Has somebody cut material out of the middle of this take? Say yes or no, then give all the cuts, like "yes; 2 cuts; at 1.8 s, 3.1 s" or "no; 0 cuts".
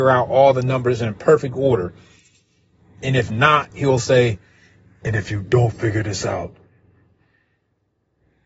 no; 0 cuts